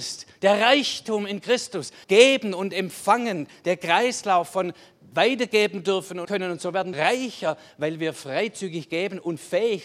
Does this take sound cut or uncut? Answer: cut